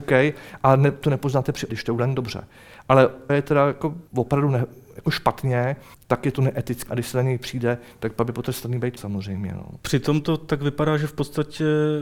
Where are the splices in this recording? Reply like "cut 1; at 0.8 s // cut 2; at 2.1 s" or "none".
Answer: cut 1; at 1.0 s // cut 2; at 1.7 s // cut 3; at 3.3 s // cut 4; at 4.1 s // cut 5; at 5.9 s // cut 6; at 6.9 s // cut 7; at 9.0 s